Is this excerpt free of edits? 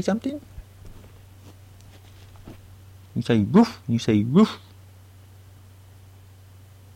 no; 2 cuts; at 2.7 s, 3.8 s

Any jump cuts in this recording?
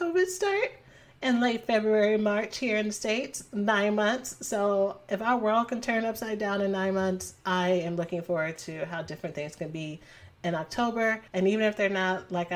yes; 1 cut; at 11.3 s

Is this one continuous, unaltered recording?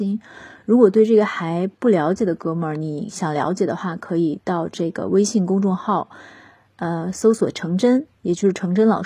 yes; 0 cuts

